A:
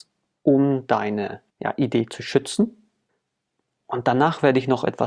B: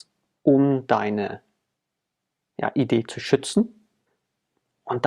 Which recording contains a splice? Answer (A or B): A